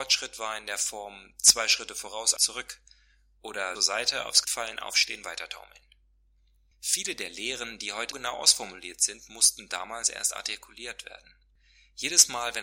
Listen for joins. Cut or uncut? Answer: cut